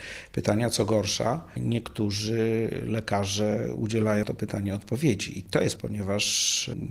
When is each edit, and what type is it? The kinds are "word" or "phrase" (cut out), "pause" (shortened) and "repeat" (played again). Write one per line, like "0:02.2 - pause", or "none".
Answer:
0:04.2 - word
0:05.8 - word